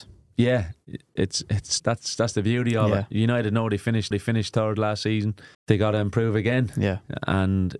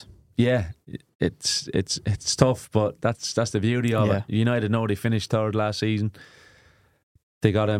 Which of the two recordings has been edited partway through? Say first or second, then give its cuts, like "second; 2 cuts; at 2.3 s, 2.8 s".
first; 4 cuts; at 1.2 s, 1.8 s, 4.1 s, 5.5 s